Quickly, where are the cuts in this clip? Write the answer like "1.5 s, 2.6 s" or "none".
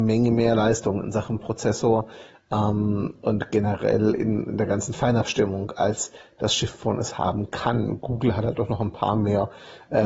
none